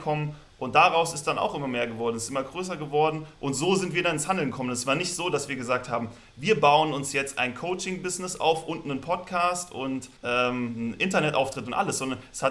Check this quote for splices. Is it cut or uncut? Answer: cut